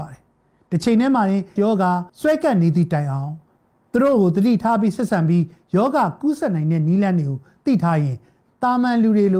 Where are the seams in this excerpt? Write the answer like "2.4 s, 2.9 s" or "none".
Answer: 1.6 s, 2.1 s